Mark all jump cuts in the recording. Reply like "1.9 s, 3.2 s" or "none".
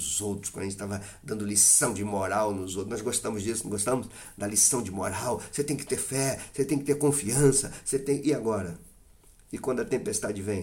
none

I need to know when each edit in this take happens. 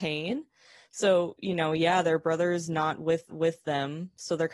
3.3 s

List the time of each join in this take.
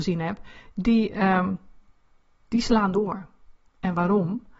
2.9 s

